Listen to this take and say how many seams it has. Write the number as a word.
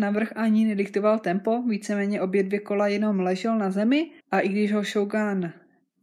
one